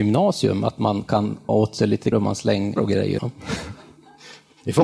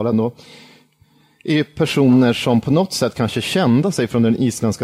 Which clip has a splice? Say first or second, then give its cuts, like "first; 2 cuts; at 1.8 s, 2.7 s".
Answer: first; 4 cuts; at 1.5 s, 2.1 s, 2.8 s, 3.2 s